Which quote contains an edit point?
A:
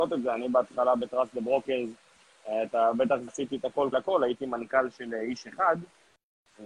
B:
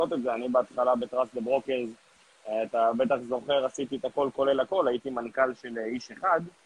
A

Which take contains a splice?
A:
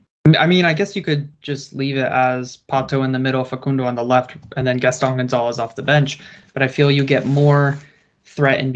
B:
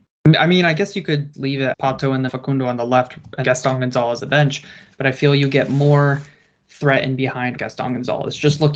B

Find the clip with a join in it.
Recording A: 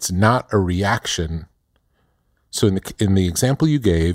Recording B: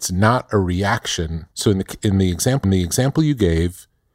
B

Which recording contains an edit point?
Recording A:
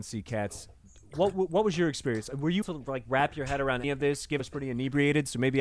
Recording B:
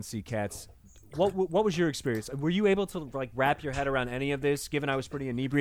A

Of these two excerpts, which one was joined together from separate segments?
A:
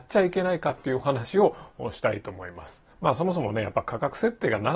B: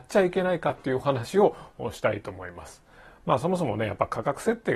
A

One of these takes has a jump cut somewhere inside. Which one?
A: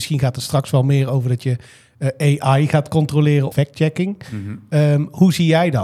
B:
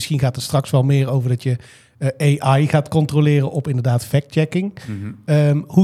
A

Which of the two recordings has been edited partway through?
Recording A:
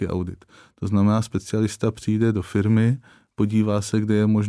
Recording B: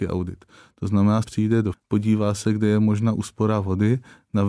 B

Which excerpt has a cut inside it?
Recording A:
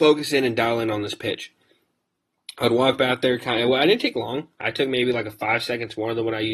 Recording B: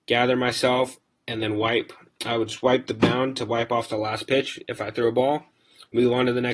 A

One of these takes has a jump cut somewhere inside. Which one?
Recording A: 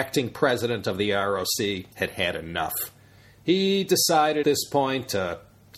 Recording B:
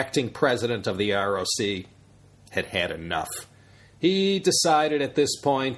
A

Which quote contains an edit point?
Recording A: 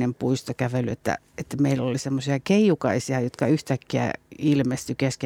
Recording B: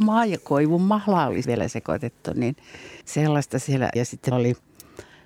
B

